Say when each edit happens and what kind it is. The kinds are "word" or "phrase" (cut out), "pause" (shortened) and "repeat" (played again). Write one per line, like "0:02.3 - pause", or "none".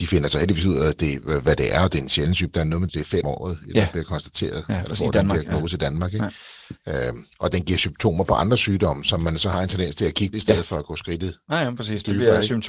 0:02.9 - word
0:03.2 - word
0:10.3 - phrase